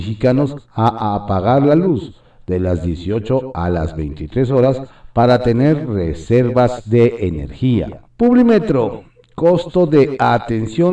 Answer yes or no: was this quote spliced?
yes